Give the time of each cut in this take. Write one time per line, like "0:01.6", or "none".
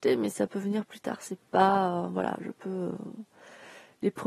none